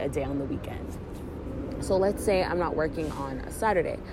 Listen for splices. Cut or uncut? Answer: uncut